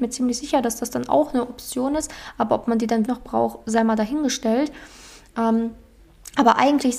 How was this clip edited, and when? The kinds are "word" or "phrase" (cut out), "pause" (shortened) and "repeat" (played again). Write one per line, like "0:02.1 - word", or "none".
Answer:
0:03.0 - word